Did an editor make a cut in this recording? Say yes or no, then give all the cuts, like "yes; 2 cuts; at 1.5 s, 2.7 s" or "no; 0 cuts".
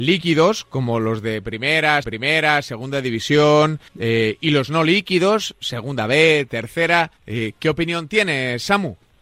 yes; 3 cuts; at 2.0 s, 3.9 s, 7.2 s